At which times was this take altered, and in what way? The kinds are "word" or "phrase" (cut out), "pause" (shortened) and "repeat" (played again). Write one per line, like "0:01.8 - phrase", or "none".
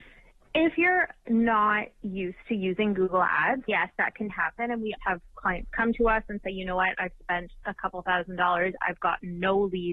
0:03.7 - word
0:04.3 - word
0:05.0 - word